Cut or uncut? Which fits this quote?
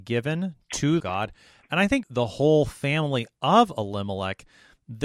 cut